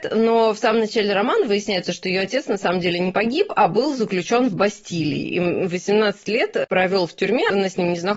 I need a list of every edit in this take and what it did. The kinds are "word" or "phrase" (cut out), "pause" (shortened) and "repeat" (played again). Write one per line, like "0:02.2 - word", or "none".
none